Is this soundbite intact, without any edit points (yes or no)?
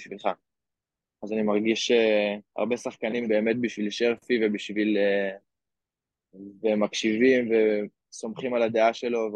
no